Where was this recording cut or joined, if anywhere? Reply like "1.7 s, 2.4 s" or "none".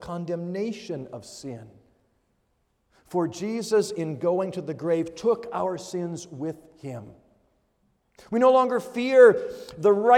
none

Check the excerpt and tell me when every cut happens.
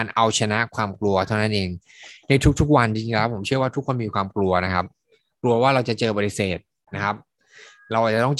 none

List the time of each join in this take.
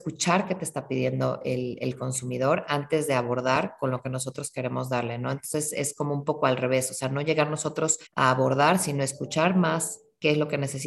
8.1 s

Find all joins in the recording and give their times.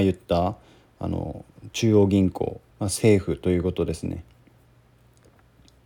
2.7 s

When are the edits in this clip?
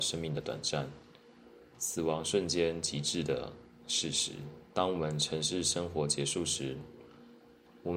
4.7 s

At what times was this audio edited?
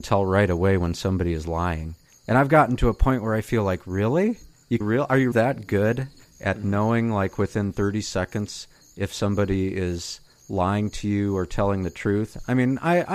4.8 s, 5.3 s

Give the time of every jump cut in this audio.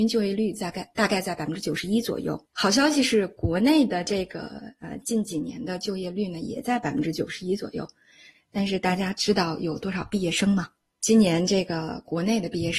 2.4 s

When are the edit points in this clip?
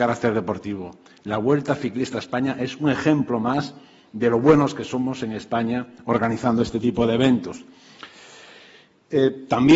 none

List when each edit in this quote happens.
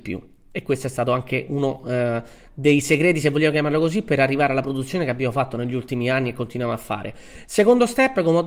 none

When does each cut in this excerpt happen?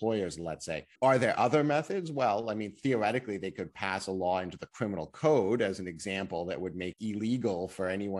0.9 s, 6.9 s

